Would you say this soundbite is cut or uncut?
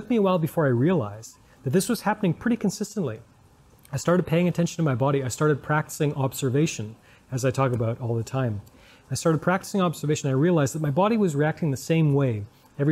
uncut